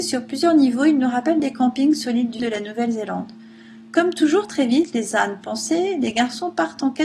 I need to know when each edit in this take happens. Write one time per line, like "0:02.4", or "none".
0:02.4